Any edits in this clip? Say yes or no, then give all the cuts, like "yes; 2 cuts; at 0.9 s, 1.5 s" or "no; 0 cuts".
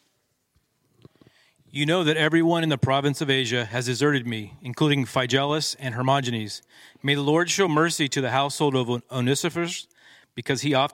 no; 0 cuts